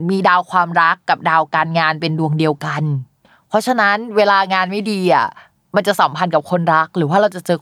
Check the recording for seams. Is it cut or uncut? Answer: uncut